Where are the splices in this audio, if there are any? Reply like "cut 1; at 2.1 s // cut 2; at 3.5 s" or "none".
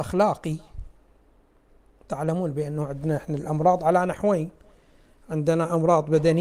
none